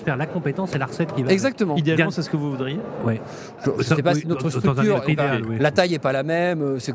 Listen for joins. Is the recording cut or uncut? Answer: uncut